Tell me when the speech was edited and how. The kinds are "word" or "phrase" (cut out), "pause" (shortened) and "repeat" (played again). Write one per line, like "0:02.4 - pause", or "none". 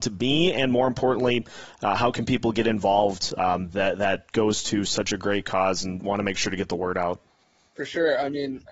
none